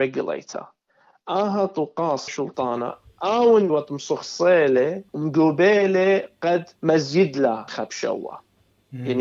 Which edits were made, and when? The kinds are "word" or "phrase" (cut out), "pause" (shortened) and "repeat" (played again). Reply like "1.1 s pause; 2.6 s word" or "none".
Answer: 2.3 s word; 3.7 s word; 5.1 s pause; 6.8 s pause; 7.7 s word